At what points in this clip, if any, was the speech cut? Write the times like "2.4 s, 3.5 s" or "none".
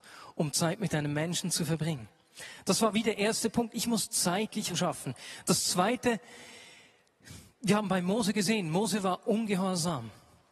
4.7 s